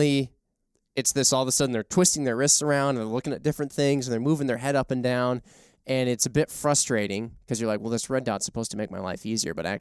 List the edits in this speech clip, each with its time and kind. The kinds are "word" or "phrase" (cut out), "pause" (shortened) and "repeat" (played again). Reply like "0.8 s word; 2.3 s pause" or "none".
none